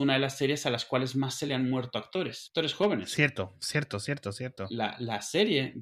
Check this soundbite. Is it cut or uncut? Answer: uncut